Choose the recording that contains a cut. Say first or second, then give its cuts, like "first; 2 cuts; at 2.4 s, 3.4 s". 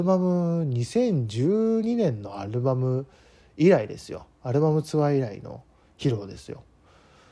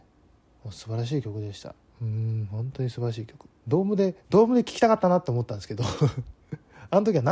second; 1 cut; at 3.6 s